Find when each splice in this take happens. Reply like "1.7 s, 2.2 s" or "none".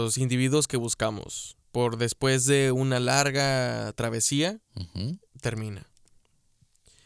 1.6 s, 4.6 s, 5.3 s

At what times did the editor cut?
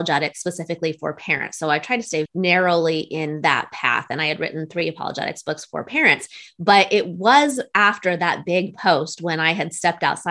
2.3 s

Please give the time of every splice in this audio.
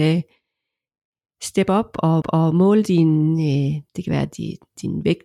2.2 s, 3.9 s

